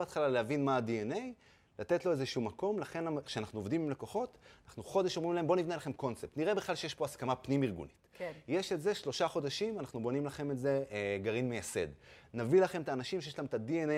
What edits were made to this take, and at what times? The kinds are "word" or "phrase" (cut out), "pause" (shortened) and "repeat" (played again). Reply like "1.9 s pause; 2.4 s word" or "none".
none